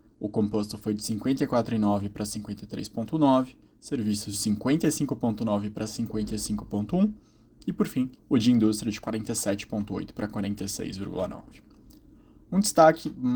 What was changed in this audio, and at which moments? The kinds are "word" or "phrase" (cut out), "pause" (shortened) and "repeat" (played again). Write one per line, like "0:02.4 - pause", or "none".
0:04.3 - word
0:08.2 - pause

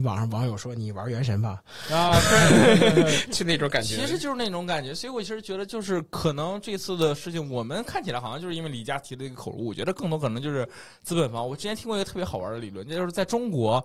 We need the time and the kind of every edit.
none

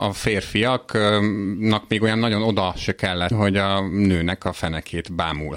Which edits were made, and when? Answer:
0:03.3 - word

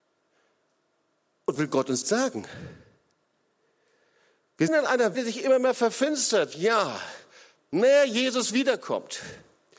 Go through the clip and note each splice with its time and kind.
0:01.6 - word
0:02.0 - word
0:04.7 - word
0:05.1 - word
0:07.6 - word

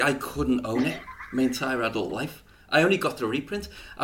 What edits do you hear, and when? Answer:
none

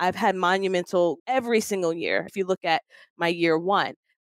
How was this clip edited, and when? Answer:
0:01.2 - word
0:02.3 - word

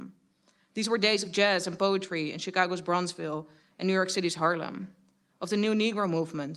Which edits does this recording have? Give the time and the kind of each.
none

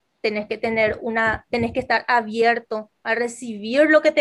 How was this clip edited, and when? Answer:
none

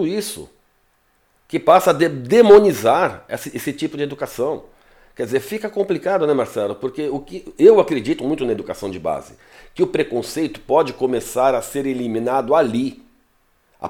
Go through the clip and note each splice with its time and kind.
none

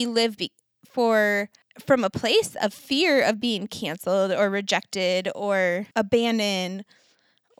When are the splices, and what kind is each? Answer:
0:05.9 - pause

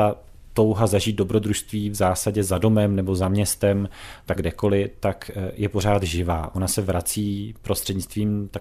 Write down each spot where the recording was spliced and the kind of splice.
0:04.4 - word

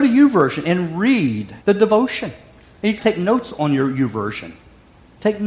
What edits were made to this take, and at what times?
0:01.6 - pause
0:03.0 - word

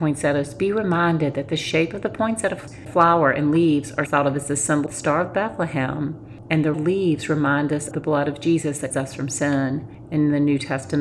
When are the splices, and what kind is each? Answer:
0:04.1 - word
0:04.9 - word
0:06.7 - word
0:07.9 - word
0:08.9 - word

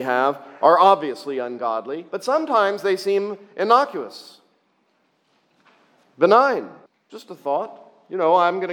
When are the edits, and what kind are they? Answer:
0:02.1 - pause
0:06.9 - pause

